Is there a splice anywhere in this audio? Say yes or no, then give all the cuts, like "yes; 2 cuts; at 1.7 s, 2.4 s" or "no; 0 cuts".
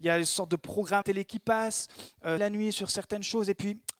yes; 2 cuts; at 1.0 s, 2.4 s